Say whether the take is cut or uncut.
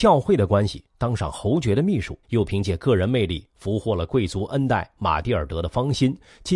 cut